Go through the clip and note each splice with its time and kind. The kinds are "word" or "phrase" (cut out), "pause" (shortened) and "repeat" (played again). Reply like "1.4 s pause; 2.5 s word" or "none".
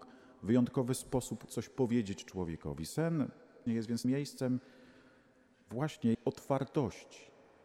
1.5 s word; 3.7 s word; 4.0 s word; 6.1 s word